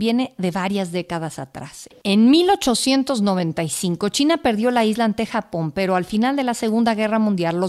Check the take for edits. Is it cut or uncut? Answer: uncut